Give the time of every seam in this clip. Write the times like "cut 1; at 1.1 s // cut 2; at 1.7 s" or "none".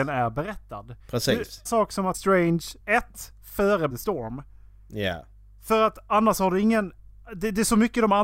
cut 1; at 1.0 s // cut 2; at 1.7 s // cut 3; at 2.1 s // cut 4; at 2.8 s // cut 5; at 3.9 s